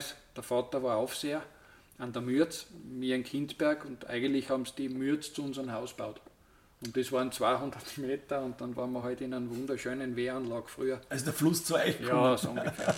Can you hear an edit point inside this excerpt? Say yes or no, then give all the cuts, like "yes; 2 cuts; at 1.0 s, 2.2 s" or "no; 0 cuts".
no; 0 cuts